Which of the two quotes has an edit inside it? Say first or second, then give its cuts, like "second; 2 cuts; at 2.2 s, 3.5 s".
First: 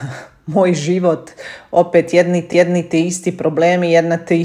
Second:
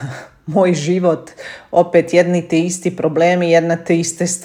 first; 1 cut; at 2.5 s